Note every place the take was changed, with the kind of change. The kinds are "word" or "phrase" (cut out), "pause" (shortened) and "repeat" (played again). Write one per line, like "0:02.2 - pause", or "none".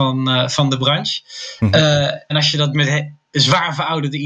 0:02.3 - word
0:02.7 - word

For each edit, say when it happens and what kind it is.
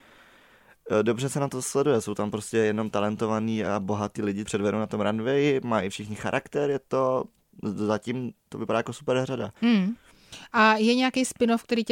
0:04.5 - phrase
0:09.6 - pause

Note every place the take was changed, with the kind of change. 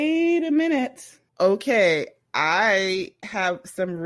0:01.3 - pause

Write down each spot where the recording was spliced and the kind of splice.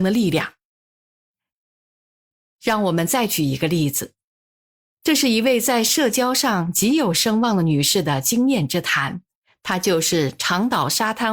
none

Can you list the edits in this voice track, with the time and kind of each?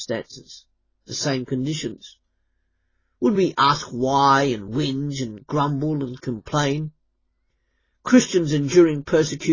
none

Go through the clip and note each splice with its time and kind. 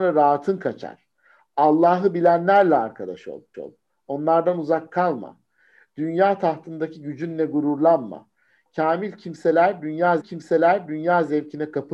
0:03.5 - repeat
0:10.2 - repeat

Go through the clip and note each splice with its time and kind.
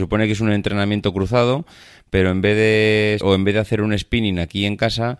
0:03.2 - word

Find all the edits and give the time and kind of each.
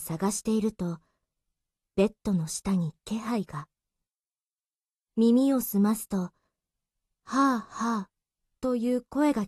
none

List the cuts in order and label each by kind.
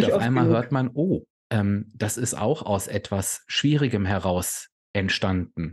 none

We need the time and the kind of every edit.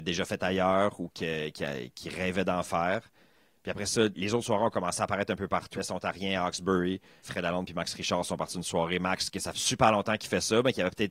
0:04.1 - word
0:05.8 - word
0:07.2 - word
0:09.5 - word

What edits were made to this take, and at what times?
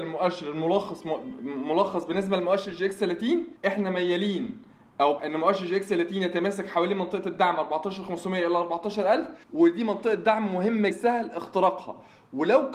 0:03.6 - pause
0:05.2 - word
0:09.4 - pause
0:10.9 - phrase

